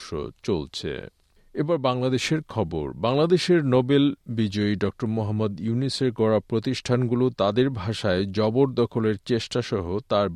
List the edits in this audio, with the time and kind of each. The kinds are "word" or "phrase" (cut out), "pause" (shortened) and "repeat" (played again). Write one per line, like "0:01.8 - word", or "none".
none